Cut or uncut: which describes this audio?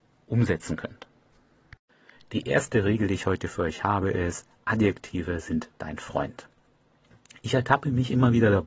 uncut